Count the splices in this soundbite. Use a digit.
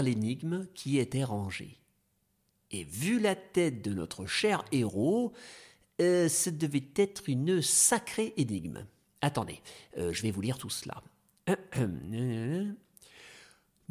0